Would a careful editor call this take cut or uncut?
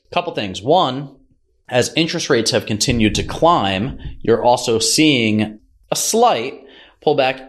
uncut